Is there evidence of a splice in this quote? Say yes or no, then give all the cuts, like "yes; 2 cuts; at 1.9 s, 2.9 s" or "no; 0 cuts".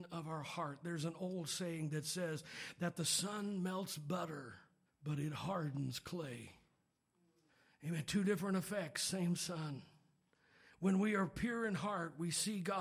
yes; 2 cuts; at 4.9 s, 7.5 s